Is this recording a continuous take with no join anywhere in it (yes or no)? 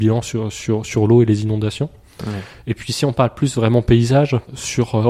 yes